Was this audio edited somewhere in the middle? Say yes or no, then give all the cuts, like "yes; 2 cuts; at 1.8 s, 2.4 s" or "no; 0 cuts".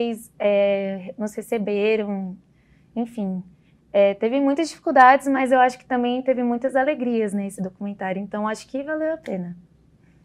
no; 0 cuts